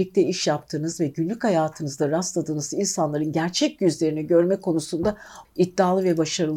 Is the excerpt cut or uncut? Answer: cut